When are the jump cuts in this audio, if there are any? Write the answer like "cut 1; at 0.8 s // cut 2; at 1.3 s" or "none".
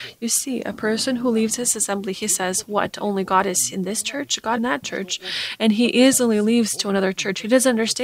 cut 1; at 4.6 s